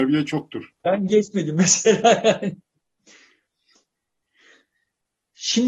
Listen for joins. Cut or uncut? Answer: uncut